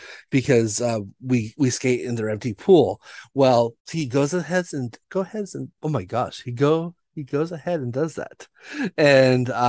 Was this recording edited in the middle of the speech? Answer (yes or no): yes